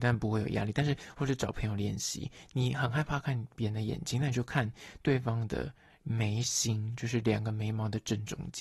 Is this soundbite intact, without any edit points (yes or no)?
yes